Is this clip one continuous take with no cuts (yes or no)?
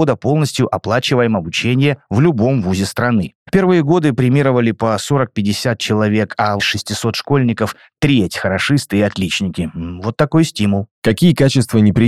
no